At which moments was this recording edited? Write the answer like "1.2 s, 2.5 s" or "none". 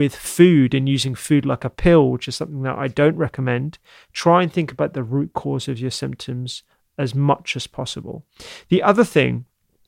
none